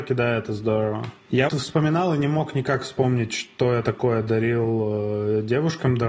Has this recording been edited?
yes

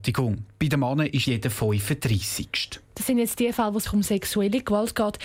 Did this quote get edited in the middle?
yes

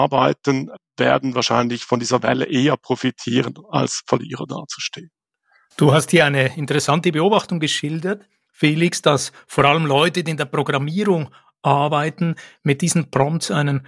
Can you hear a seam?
no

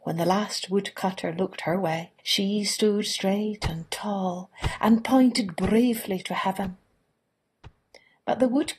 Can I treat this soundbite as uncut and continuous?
no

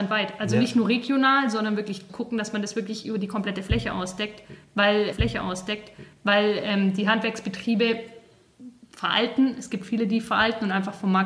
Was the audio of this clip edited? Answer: yes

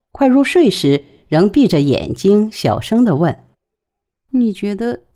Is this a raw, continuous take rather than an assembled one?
no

